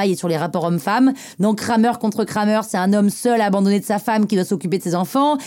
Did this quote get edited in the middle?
no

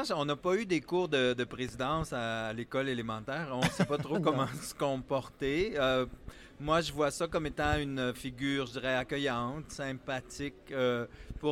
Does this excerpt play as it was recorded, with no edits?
yes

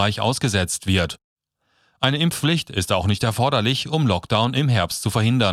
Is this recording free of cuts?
yes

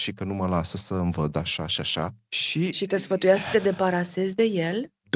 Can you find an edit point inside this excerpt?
no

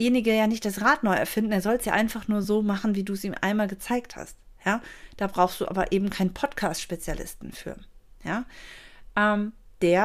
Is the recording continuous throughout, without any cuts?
yes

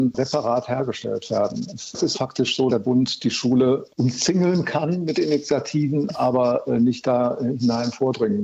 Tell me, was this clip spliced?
yes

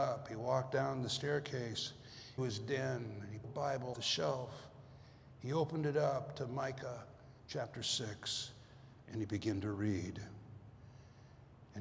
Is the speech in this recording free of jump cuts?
no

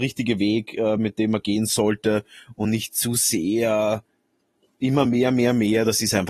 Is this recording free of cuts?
yes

